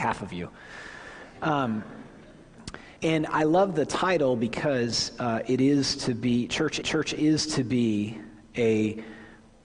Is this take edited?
yes; 2 cuts; at 3.0 s, 6.8 s

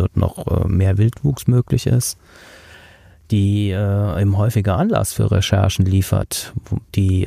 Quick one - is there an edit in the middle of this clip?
no; 0 cuts

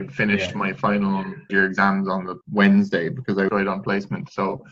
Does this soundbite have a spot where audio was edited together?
yes; 3 cuts; at 1.5 s, 2.4 s, 3.5 s

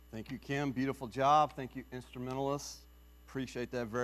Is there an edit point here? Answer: no; 0 cuts

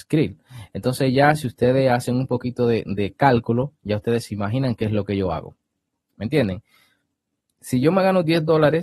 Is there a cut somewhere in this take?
no; 0 cuts

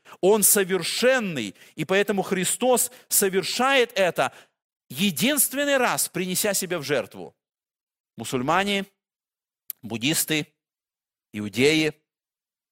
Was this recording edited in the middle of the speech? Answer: no; 0 cuts

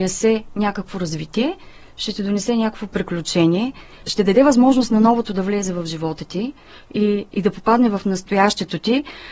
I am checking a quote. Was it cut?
no; 0 cuts

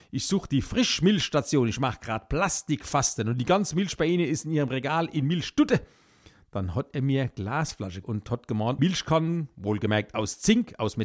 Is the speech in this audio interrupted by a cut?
yes; 2 cuts; at 8.0 s, 8.8 s

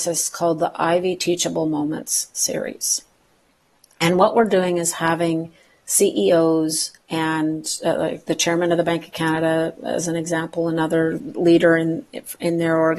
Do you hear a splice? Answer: no; 0 cuts

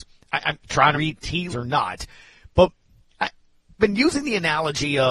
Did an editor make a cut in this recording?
yes; 3 cuts; at 0.9 s, 1.5 s, 3.8 s

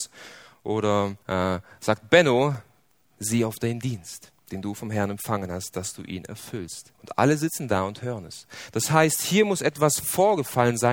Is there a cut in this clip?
yes; 4 cuts; at 1.2 s, 3.0 s, 4.4 s, 6.9 s

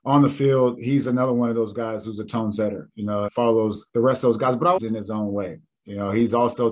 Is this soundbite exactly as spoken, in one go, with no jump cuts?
no; 3 cuts; at 3.3 s, 3.9 s, 4.8 s

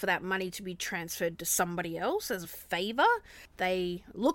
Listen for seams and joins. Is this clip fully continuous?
yes; 0 cuts

